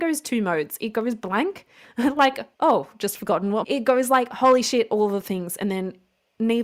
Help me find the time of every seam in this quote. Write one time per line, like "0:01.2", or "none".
0:02.5
0:03.6